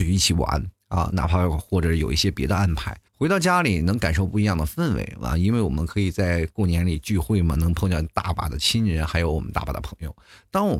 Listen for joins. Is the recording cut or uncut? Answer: cut